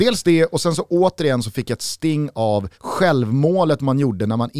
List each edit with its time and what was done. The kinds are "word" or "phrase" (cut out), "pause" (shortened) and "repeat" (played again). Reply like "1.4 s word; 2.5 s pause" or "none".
2.7 s pause